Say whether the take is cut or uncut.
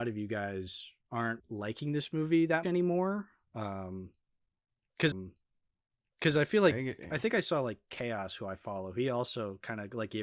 cut